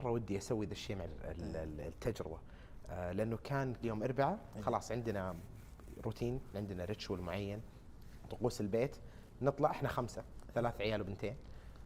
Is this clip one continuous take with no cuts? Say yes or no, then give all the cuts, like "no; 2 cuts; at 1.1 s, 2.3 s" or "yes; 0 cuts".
no; 3 cuts; at 1.1 s, 3.8 s, 6.5 s